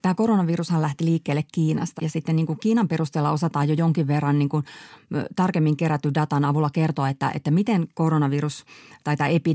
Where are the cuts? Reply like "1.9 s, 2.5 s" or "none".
2.0 s